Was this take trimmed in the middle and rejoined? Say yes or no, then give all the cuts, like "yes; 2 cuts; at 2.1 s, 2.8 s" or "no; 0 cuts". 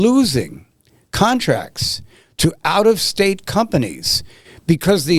no; 0 cuts